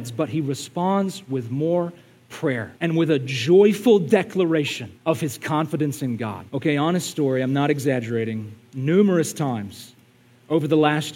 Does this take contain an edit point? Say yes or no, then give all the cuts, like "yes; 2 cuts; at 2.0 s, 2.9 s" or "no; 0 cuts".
yes; 3 cuts; at 2.8 s, 5.0 s, 6.5 s